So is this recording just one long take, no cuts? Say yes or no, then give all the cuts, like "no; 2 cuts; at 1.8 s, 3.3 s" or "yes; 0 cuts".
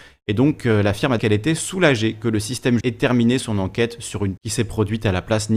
no; 3 cuts; at 1.2 s, 2.8 s, 4.4 s